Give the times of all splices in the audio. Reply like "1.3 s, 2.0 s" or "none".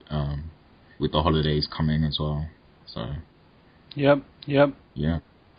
1.0 s, 4.3 s